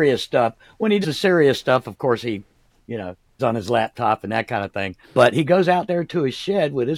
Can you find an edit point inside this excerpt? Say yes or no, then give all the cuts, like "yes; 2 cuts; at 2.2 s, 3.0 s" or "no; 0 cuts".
yes; 4 cuts; at 1.0 s, 2.8 s, 3.4 s, 5.0 s